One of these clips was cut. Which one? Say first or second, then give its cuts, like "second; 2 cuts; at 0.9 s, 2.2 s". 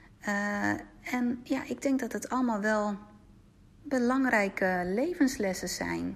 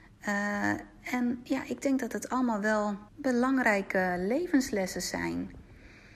second; 1 cut; at 3.1 s